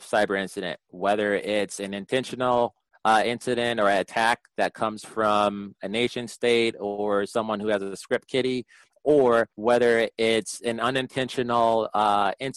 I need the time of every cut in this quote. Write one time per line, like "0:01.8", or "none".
0:09.5